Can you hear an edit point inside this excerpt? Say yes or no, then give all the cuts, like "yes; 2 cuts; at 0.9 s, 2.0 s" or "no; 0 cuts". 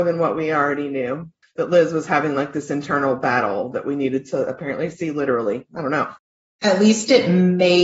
no; 0 cuts